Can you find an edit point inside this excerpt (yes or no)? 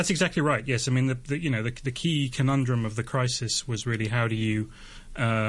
no